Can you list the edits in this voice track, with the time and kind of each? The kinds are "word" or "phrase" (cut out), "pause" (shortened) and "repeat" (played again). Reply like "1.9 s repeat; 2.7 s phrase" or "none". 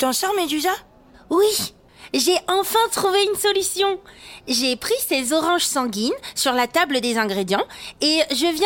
none